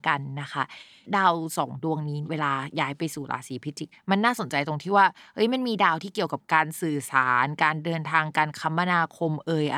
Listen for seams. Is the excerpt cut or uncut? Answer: uncut